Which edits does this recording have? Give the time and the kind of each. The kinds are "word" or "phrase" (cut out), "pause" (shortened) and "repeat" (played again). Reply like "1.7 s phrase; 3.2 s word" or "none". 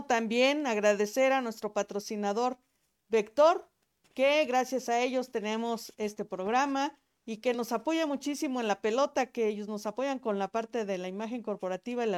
none

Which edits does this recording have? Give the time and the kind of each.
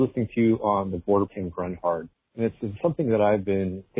1.3 s phrase; 2.1 s pause

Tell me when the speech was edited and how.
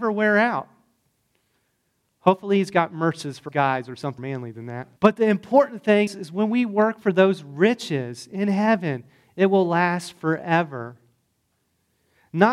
3.5 s word; 4.2 s word; 5.0 s pause; 6.1 s word

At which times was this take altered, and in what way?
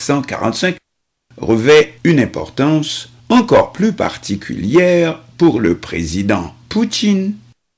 2.0 s pause; 3.2 s pause

